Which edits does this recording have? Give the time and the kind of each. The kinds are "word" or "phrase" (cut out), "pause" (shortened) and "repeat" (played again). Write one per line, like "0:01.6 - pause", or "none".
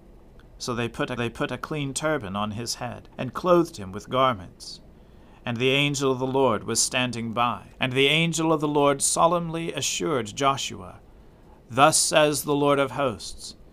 0:01.2 - repeat
0:03.1 - pause
0:07.7 - pause